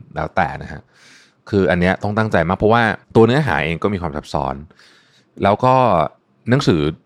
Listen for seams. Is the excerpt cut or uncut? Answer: cut